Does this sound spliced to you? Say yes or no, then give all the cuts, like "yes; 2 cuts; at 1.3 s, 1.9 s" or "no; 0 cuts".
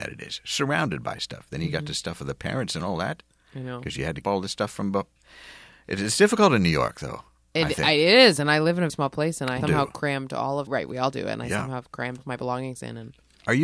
yes; 5 cuts; at 4.2 s, 8.9 s, 9.6 s, 10.7 s, 12.2 s